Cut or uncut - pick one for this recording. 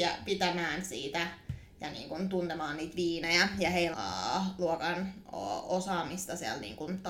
cut